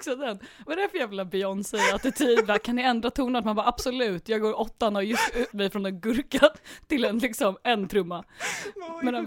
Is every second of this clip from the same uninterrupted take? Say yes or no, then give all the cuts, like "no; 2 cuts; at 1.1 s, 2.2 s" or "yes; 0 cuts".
no; 1 cut; at 5.5 s